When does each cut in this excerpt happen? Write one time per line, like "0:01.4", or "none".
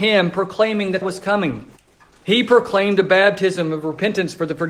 0:01.0
0:01.8